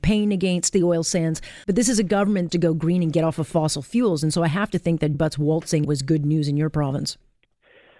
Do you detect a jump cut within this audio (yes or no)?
yes